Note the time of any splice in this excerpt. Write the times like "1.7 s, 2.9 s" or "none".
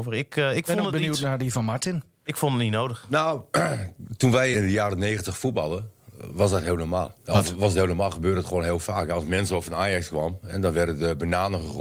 4.5 s, 7.2 s